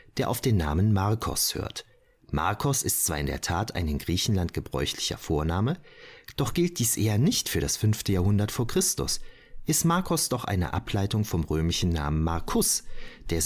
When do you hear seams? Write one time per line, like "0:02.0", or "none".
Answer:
none